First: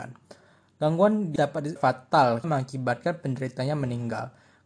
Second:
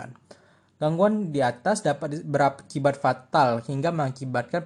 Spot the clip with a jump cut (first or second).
first